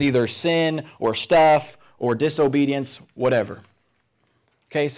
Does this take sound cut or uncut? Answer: uncut